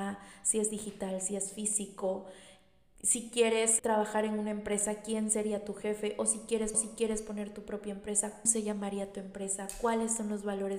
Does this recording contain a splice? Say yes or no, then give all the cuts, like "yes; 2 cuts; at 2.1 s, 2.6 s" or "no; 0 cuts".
yes; 3 cuts; at 3.8 s, 6.7 s, 8.5 s